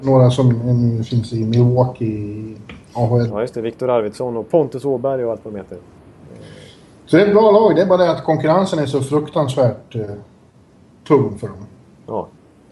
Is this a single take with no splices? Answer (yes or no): yes